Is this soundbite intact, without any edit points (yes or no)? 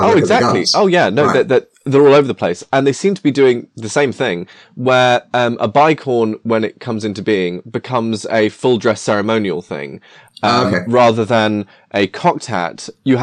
yes